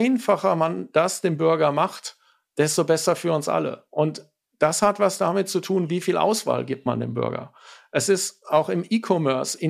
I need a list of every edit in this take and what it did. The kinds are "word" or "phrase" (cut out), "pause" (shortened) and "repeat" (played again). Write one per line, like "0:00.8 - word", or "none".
none